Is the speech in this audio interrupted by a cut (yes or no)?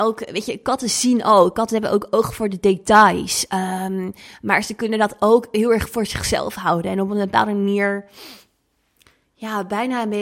no